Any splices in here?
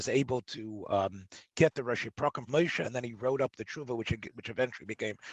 yes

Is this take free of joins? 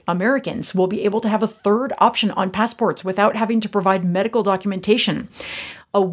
yes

